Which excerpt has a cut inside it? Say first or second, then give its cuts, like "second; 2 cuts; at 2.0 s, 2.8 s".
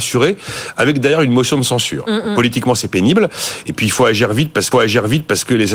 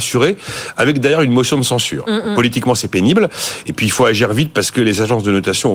first; 1 cut; at 4.7 s